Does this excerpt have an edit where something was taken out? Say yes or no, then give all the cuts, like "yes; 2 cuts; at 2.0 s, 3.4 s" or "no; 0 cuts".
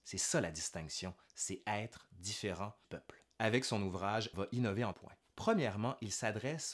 yes; 3 cuts; at 2.8 s, 4.3 s, 4.9 s